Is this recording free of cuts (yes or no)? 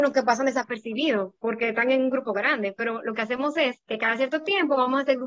no